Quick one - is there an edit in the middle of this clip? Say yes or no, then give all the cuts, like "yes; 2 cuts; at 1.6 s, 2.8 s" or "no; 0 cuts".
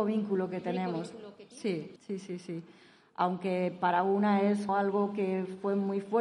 yes; 2 cuts; at 2.0 s, 4.7 s